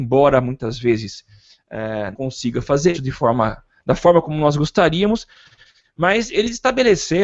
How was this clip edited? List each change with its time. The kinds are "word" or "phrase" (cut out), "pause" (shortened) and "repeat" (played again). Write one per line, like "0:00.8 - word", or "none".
0:02.1 - word
0:02.9 - word